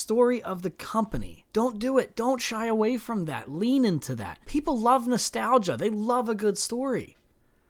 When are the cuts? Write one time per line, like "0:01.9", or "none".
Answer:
0:01.5
0:04.4